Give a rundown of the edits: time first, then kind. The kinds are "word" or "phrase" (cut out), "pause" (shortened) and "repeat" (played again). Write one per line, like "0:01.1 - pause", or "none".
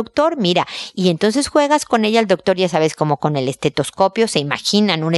none